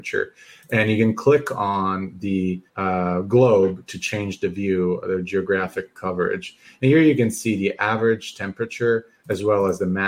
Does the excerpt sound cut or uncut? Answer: cut